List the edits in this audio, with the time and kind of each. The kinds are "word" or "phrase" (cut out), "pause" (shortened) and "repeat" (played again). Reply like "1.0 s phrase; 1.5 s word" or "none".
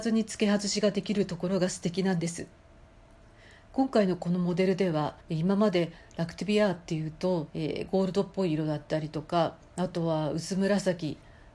5.2 s pause; 7.5 s pause